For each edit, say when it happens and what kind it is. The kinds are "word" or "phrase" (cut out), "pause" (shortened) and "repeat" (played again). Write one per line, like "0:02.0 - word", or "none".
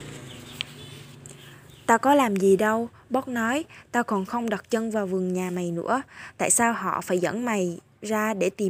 none